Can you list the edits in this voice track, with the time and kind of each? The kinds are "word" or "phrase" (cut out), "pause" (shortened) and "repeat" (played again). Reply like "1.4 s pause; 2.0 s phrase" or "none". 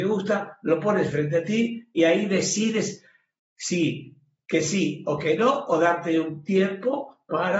none